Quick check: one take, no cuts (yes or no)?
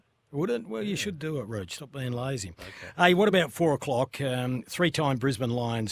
yes